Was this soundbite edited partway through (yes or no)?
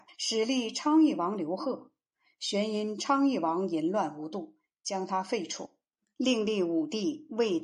no